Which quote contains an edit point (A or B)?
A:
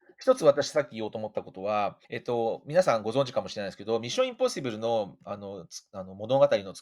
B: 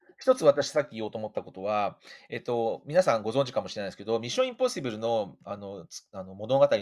A